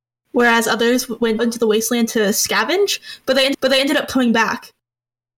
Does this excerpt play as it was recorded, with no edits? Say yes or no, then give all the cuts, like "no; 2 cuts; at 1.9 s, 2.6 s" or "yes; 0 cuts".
no; 2 cuts; at 1.4 s, 3.5 s